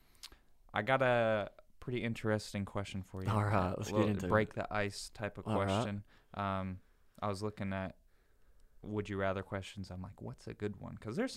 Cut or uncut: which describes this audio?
uncut